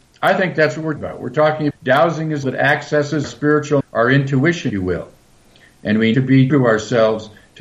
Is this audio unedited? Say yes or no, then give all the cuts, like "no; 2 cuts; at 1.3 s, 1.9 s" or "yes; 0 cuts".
no; 8 cuts; at 1.0 s, 1.7 s, 2.4 s, 3.2 s, 3.8 s, 4.7 s, 6.1 s, 6.5 s